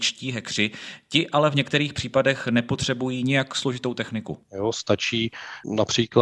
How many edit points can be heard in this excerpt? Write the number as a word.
one